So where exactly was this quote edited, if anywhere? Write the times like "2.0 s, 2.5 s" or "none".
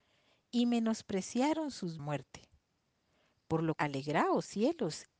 2.0 s, 3.8 s

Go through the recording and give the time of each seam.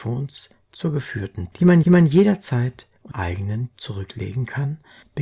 1.5 s, 1.8 s, 3.1 s, 3.7 s

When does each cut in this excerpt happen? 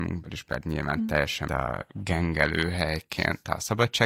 1.5 s

